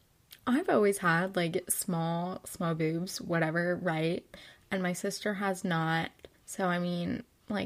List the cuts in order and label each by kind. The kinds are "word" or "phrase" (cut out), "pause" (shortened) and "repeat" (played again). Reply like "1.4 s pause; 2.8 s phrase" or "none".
6.4 s pause